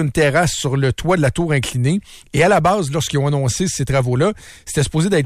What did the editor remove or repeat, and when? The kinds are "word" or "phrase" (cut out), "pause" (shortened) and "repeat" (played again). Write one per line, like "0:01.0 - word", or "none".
none